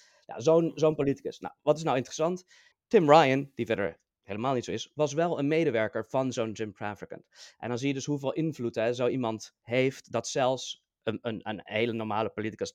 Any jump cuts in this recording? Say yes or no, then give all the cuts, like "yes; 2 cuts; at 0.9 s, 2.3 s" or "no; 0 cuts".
yes; 1 cut; at 2.7 s